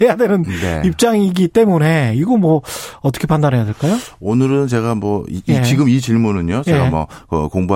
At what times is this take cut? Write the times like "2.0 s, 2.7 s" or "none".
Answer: none